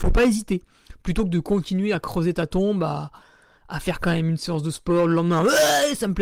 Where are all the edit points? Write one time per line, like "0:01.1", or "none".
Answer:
none